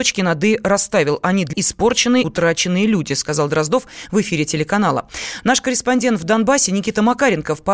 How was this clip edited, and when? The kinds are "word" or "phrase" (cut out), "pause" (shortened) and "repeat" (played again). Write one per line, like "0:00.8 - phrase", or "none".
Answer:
0:01.5 - word
0:02.2 - word